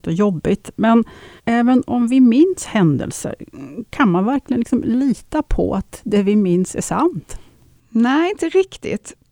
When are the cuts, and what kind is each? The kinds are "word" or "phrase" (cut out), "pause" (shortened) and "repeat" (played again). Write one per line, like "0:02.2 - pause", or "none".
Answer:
0:01.4 - pause